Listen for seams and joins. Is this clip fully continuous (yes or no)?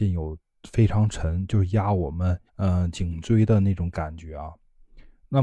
no